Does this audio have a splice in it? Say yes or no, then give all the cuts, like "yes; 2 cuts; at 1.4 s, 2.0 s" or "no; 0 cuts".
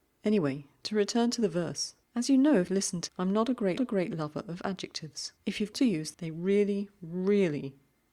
yes; 7 cuts; at 2.0 s, 2.7 s, 3.1 s, 3.8 s, 5.4 s, 5.7 s, 6.1 s